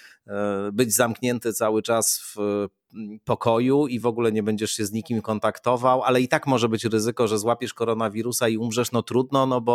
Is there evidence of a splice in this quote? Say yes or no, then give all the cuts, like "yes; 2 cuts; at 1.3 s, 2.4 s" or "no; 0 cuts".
no; 0 cuts